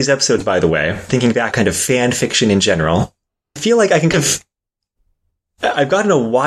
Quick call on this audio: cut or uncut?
cut